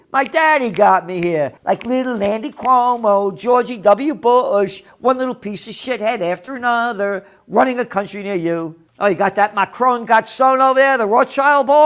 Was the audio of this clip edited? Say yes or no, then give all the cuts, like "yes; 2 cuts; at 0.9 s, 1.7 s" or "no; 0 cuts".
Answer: yes; 2 cuts; at 1.6 s, 8.9 s